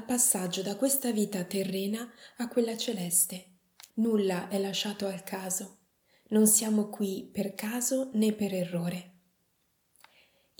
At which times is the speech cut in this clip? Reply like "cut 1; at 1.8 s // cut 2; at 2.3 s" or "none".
cut 1; at 3.9 s